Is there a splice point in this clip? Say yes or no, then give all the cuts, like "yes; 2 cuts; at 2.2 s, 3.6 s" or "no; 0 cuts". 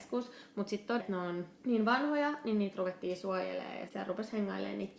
yes; 3 cuts; at 1.0 s, 1.6 s, 3.9 s